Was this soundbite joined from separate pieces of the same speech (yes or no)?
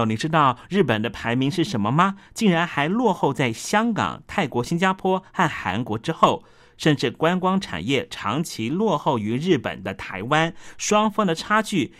no